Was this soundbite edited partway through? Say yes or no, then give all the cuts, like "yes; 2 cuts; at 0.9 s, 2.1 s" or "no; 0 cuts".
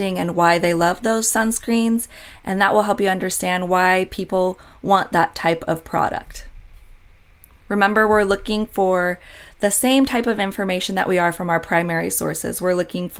no; 0 cuts